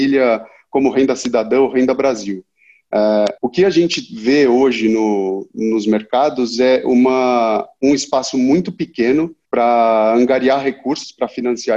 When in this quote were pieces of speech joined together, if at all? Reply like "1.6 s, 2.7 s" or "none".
3.4 s, 9.4 s